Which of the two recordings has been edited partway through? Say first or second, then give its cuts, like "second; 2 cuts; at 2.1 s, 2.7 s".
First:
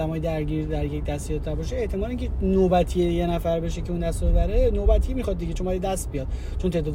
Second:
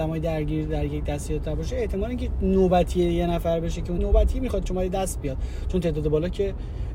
second; 2 cuts; at 4.0 s, 4.6 s